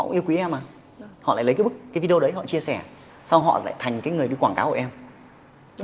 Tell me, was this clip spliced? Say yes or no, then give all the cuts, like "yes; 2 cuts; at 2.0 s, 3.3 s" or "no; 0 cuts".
no; 0 cuts